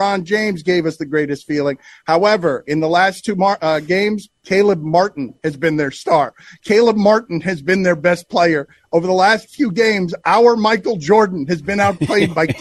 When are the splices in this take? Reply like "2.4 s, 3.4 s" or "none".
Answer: none